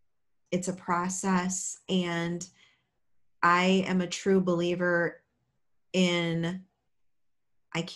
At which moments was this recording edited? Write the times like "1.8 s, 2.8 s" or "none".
none